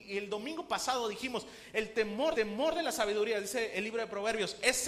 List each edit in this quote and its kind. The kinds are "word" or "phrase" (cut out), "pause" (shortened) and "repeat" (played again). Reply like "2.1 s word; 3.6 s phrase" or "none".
2.3 s repeat